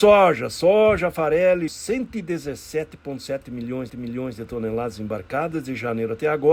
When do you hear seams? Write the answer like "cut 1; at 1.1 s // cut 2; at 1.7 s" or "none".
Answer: cut 1; at 1.7 s // cut 2; at 3.9 s